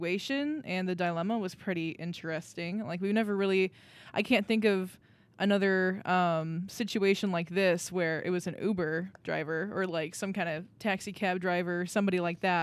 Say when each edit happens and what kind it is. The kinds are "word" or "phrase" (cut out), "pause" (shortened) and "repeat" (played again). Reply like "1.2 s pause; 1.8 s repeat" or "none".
none